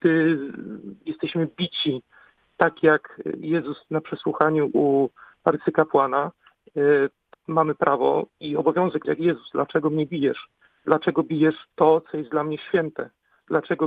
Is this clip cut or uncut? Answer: cut